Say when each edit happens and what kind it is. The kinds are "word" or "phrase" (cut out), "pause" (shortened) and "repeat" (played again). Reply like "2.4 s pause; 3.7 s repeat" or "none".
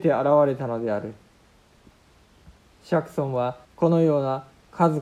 3.6 s pause